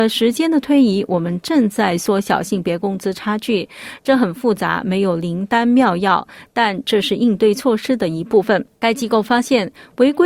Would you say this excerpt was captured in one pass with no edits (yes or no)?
no